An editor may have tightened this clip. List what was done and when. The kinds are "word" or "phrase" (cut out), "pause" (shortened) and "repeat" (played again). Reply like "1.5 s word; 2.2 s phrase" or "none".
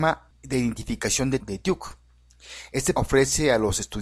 1.4 s word; 3.0 s word